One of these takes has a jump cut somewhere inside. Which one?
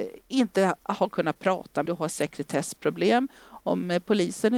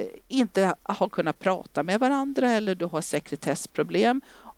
first; 1 cut; at 1.9 s

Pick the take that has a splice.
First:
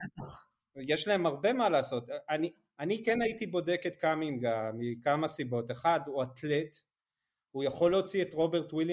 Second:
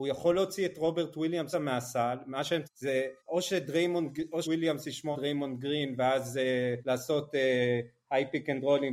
second; 6 cuts; at 1.5 s, 2.6 s, 3.2 s, 4.4 s, 5.1 s, 6.8 s

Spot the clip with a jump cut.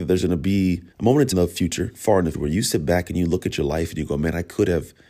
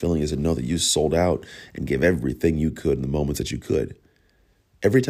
first; 3 cuts; at 0.9 s, 1.3 s, 2.3 s

